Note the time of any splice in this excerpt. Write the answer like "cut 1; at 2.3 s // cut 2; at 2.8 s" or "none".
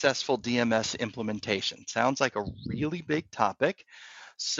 none